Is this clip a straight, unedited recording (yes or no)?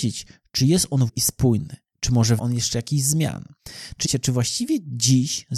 no